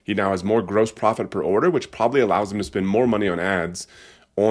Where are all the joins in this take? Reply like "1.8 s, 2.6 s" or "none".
none